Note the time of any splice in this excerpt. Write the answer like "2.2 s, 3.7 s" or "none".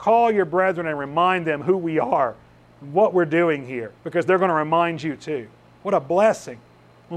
4.0 s